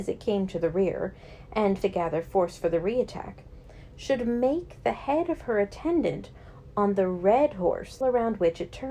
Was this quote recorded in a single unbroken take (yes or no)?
no